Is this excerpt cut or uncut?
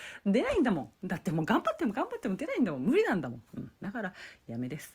cut